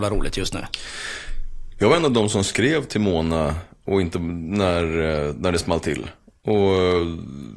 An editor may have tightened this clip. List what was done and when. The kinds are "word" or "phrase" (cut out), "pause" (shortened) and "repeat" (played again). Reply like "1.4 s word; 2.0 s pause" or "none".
none